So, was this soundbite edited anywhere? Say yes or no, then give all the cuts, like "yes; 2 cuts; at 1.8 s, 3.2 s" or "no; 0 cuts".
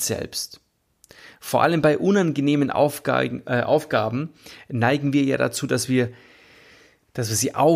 no; 0 cuts